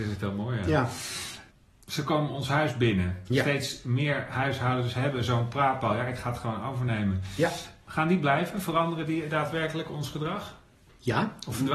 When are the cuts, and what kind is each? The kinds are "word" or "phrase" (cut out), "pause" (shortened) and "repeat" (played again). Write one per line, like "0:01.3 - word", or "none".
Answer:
0:07.8 - pause